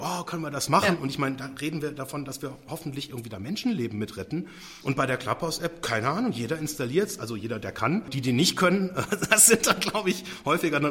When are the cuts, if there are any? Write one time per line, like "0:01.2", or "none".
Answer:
none